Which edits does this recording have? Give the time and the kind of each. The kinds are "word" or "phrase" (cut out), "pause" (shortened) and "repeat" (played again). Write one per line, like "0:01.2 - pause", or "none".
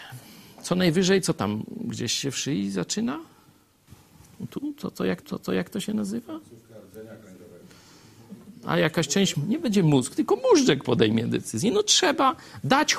0:05.2 - repeat
0:09.3 - word